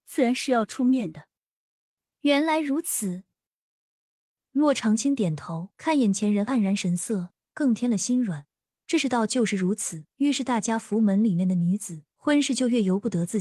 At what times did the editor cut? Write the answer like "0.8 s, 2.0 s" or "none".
5.7 s, 10.1 s, 12.1 s

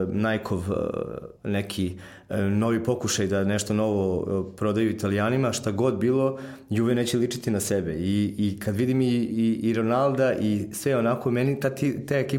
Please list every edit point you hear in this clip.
1.4 s

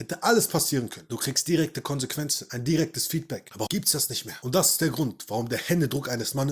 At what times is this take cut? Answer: 3.7 s

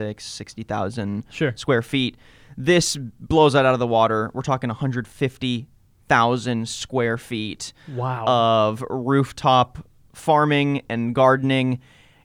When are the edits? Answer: none

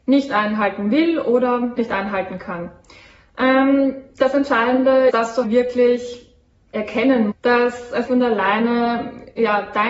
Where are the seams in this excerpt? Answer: 1.8 s, 5.1 s, 5.4 s, 7.3 s, 8.1 s

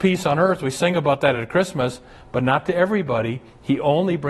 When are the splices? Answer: none

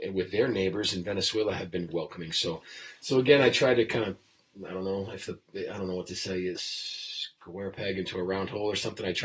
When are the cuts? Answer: 1.9 s, 6.6 s

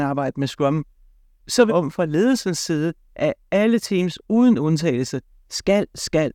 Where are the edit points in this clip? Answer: 1.7 s

